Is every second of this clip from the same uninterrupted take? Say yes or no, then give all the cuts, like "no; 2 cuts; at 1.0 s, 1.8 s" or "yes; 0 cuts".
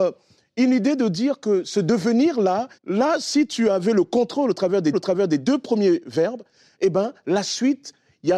no; 2 cuts; at 2.8 s, 4.9 s